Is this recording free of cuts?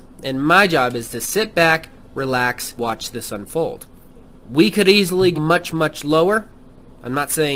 no; 3 cuts; at 2.8 s, 4.0 s, 5.3 s

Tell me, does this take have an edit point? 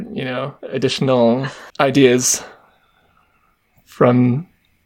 yes; 1 cut; at 1.7 s

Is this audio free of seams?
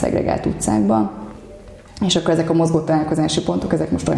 yes; 0 cuts

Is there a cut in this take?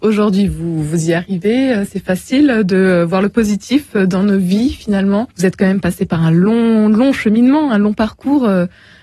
yes; 1 cut; at 5.3 s

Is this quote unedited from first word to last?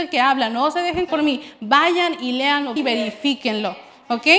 no; 2 cuts; at 1.1 s, 2.8 s

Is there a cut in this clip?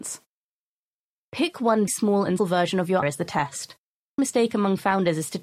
yes; 4 cuts; at 1.9 s, 2.4 s, 3.0 s, 4.2 s

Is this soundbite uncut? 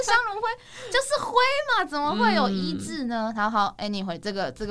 yes; 0 cuts

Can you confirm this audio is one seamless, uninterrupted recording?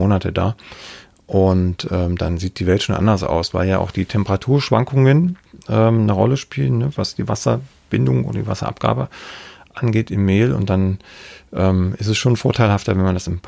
yes; 0 cuts

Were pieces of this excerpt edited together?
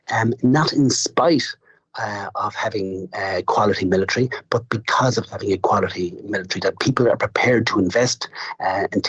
no; 0 cuts

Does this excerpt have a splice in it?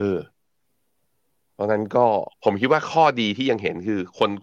yes; 1 cut; at 2.3 s

